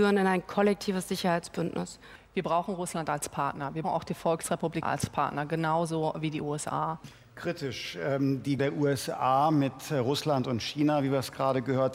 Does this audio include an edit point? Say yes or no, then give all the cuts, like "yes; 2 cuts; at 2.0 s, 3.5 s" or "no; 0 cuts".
yes; 3 cuts; at 3.8 s, 4.8 s, 8.6 s